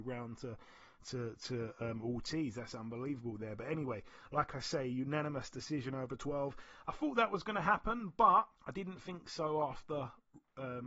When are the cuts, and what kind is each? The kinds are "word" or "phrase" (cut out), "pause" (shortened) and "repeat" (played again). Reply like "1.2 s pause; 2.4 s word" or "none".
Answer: 8.5 s pause